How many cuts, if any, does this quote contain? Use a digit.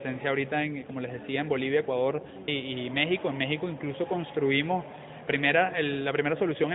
2